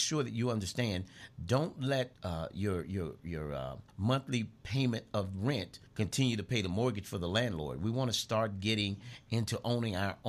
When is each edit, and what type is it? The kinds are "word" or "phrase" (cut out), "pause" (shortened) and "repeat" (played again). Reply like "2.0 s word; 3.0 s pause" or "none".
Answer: 2.1 s pause; 3.9 s pause; 5.9 s pause